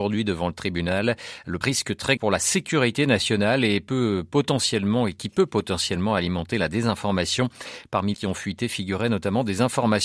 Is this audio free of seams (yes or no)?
no